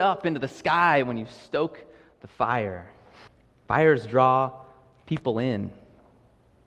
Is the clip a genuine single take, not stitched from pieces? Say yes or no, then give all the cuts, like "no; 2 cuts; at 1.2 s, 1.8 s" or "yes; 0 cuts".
no; 1 cut; at 3.3 s